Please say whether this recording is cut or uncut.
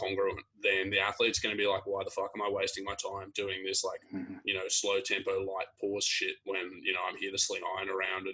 uncut